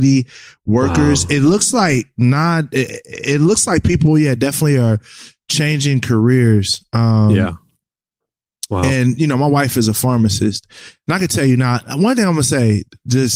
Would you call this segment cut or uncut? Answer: uncut